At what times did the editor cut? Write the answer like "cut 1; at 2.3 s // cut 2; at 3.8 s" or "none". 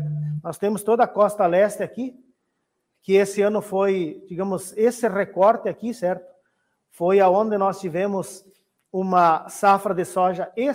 none

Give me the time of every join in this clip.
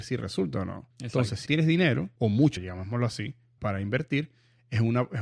cut 1; at 0.9 s // cut 2; at 1.5 s // cut 3; at 2.2 s // cut 4; at 2.6 s // cut 5; at 3.6 s

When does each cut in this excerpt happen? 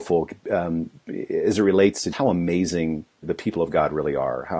cut 1; at 2.1 s // cut 2; at 3.2 s

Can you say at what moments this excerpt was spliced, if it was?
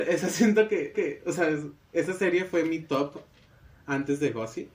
cut 1; at 0.9 s

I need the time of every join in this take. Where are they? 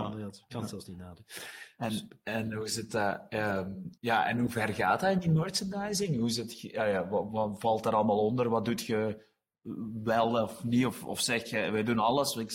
cut 1; at 4.0 s

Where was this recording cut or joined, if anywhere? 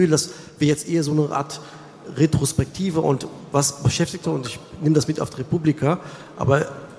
cut 1; at 4.2 s

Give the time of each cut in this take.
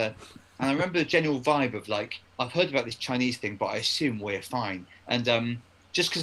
cut 1; at 2.3 s

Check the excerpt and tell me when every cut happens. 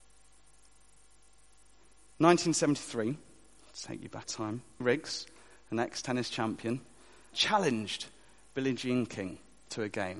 cut 1; at 4.2 s // cut 2; at 4.8 s // cut 3; at 7.3 s

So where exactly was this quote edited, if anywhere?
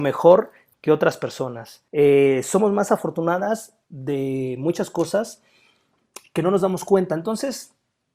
cut 1; at 1.9 s // cut 2; at 3.8 s

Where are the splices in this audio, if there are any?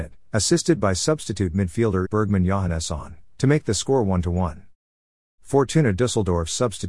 cut 1; at 2.0 s

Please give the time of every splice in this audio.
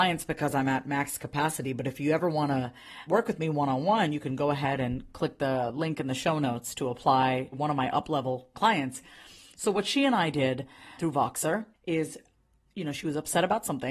cut 1; at 3.1 s // cut 2; at 7.5 s // cut 3; at 8.5 s // cut 4; at 11.0 s // cut 5; at 11.7 s

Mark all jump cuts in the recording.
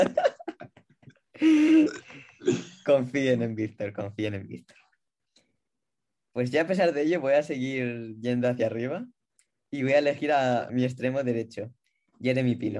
cut 1; at 10.7 s

